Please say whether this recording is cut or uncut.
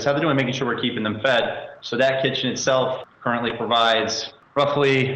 uncut